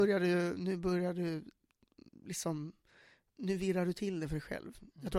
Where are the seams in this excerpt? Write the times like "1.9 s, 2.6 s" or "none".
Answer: none